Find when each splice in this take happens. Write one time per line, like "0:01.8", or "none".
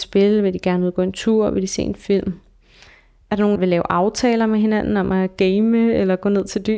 0:03.6